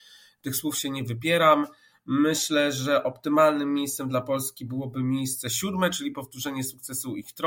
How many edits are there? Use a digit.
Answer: 0